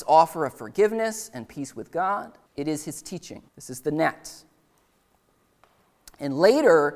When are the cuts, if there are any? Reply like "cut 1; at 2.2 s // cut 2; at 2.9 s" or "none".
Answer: cut 1; at 2.5 s // cut 2; at 3.5 s